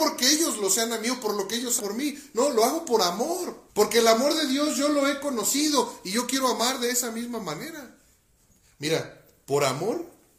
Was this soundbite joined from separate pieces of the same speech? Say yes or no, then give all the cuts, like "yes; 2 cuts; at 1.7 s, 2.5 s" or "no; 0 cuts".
yes; 2 cuts; at 1.8 s, 3.7 s